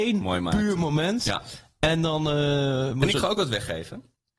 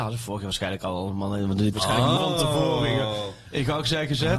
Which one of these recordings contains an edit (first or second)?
second